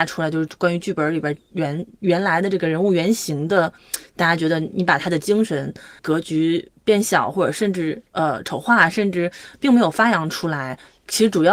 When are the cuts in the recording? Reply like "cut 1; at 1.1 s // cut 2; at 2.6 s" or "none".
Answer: cut 1; at 6.0 s // cut 2; at 8.1 s